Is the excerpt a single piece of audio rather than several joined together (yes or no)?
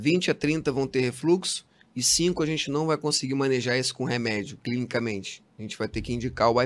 yes